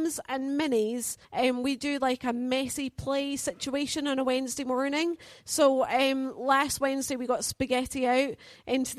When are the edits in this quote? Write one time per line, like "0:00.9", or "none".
0:01.2